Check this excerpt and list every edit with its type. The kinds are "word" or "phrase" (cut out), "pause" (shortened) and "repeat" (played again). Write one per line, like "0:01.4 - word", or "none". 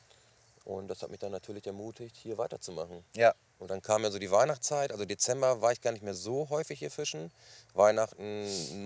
none